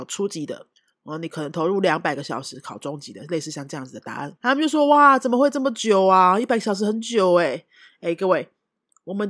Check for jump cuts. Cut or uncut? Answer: cut